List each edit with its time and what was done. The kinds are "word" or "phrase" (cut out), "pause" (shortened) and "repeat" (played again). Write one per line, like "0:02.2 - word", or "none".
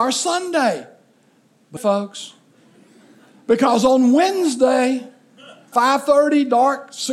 0:01.8 - phrase
0:05.7 - word